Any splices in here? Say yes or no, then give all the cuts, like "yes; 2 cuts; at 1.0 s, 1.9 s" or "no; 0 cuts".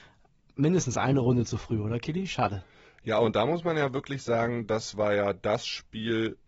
no; 0 cuts